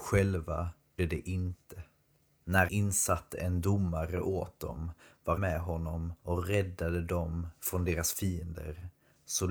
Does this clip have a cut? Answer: yes; 4 cuts; at 1.0 s, 2.7 s, 5.4 s, 6.2 s

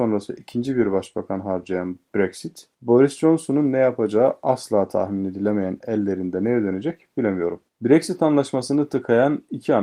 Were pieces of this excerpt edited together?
yes; 1 cut; at 7.7 s

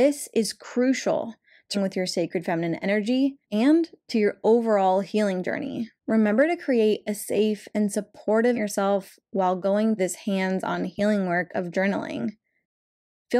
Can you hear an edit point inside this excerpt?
yes; 5 cuts; at 1.7 s, 3.4 s, 6.0 s, 8.5 s, 10.0 s

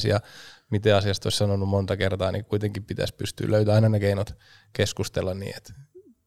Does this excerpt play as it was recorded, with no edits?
yes; 0 cuts

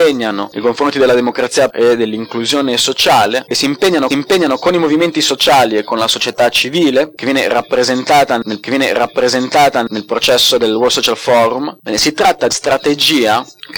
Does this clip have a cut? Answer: yes; 4 cuts; at 1.7 s, 4.1 s, 8.6 s, 12.5 s

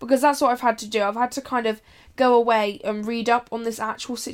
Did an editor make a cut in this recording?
no; 0 cuts

